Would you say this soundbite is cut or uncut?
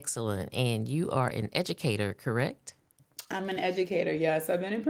uncut